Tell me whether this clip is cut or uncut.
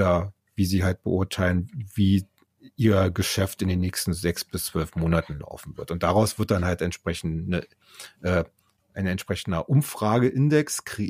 uncut